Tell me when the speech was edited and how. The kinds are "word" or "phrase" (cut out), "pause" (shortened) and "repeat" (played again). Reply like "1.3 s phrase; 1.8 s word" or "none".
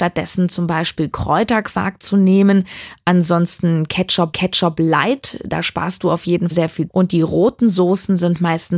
4.3 s repeat; 6.5 s word; 6.9 s word